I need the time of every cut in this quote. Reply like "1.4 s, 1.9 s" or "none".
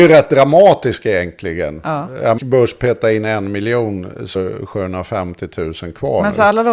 2.4 s, 4.3 s

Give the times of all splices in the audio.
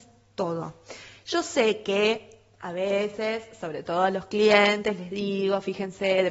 none

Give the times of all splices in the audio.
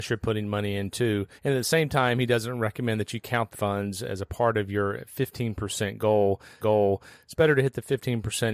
1.4 s, 3.5 s, 6.6 s

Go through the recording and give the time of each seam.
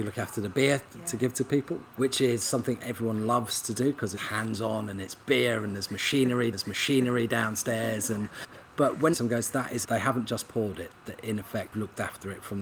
2.0 s, 4.2 s, 6.5 s, 9.1 s, 9.8 s, 11.7 s

